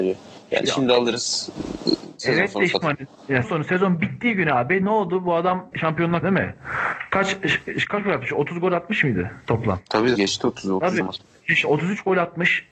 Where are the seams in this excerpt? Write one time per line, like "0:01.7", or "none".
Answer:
0:02.8
0:03.4
0:05.7
0:06.2
0:10.2
0:11.0